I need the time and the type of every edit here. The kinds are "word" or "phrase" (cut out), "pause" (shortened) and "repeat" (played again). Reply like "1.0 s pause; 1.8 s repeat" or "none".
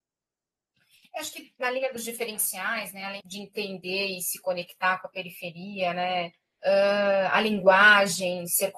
3.2 s word; 6.4 s pause

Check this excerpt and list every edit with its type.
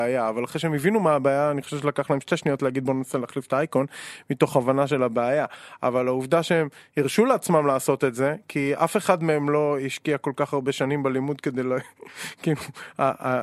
none

